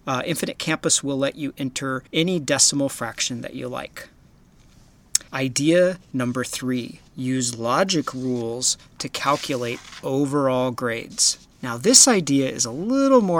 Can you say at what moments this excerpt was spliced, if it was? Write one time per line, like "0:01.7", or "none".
0:02.1
0:05.3
0:07.1
0:11.5